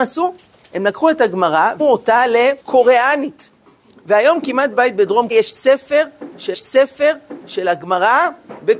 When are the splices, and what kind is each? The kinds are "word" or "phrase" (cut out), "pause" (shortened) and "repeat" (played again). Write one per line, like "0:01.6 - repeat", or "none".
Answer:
0:01.8 - word
0:02.6 - pause
0:04.7 - word
0:05.3 - word
0:06.5 - repeat